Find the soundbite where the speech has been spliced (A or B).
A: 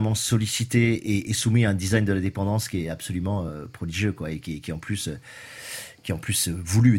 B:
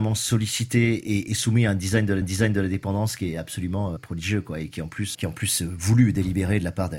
B